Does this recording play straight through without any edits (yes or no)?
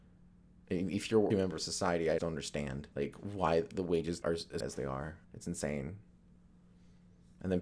no